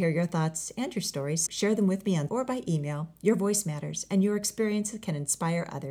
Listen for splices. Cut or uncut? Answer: cut